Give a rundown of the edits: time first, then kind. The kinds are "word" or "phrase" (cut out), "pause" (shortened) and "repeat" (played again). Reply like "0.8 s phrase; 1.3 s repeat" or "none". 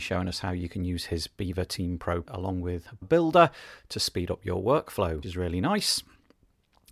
2.3 s word; 3.0 s word; 5.2 s word